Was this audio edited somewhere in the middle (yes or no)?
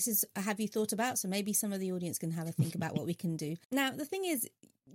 yes